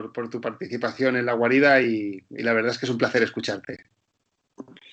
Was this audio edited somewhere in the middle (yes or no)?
no